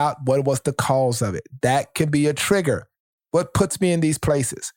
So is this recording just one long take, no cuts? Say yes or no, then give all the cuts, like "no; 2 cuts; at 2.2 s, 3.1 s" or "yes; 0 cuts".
yes; 0 cuts